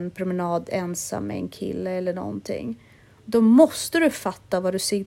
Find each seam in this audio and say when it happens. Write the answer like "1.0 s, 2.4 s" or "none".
none